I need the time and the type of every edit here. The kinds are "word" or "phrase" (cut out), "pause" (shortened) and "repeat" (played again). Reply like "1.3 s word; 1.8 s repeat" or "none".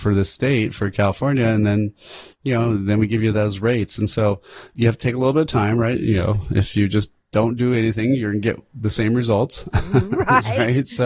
none